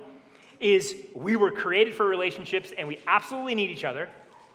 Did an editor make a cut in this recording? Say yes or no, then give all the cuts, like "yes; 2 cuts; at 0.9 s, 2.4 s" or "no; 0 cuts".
no; 0 cuts